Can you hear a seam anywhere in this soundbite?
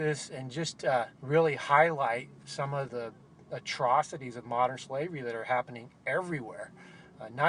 yes; 2 cuts; at 1.1 s, 2.9 s

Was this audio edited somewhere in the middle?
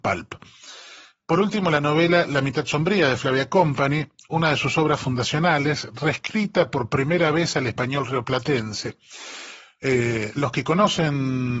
no; 0 cuts

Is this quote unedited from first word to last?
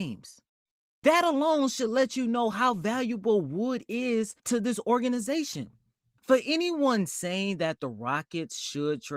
no; 1 cut; at 4.4 s

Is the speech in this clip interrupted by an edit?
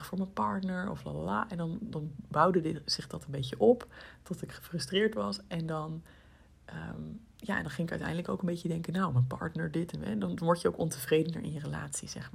yes; 1 cut; at 7.3 s

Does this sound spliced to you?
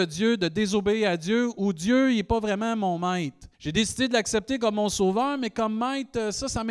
yes; 1 cut; at 3.5 s

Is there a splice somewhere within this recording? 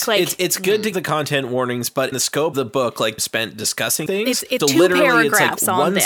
yes; 6 cuts; at 0.9 s, 2.1 s, 2.5 s, 3.2 s, 4.1 s, 4.6 s

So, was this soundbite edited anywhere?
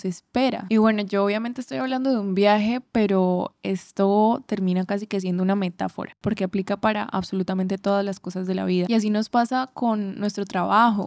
no; 0 cuts

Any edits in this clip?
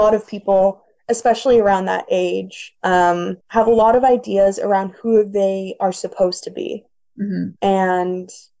yes; 2 cuts; at 3.4 s, 7.6 s

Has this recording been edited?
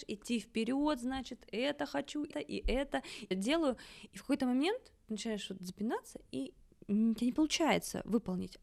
yes; 2 cuts; at 2.3 s, 3.3 s

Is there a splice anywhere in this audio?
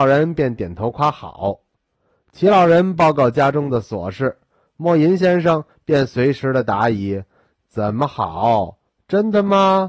no; 0 cuts

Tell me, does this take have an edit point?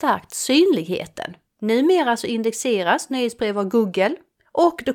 no; 0 cuts

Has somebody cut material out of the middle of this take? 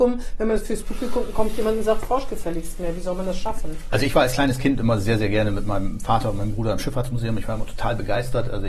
no; 0 cuts

